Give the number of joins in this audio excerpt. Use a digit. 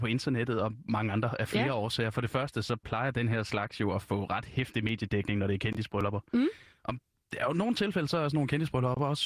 0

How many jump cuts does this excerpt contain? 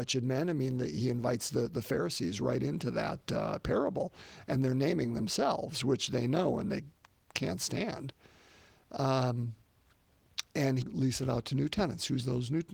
1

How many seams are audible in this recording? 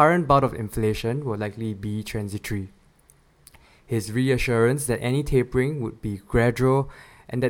0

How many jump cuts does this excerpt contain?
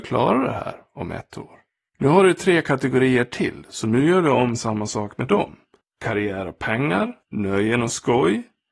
1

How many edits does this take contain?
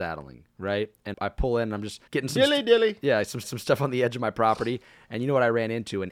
3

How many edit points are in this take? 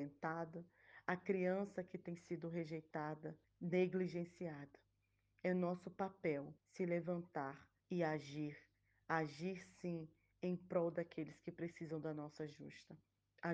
3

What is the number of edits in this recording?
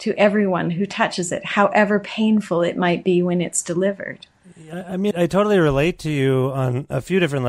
1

